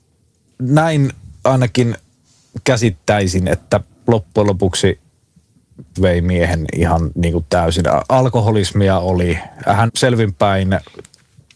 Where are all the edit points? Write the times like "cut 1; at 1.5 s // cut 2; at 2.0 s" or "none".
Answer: cut 1; at 6.0 s // cut 2; at 9.9 s